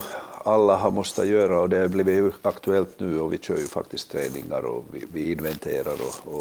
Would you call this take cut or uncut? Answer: uncut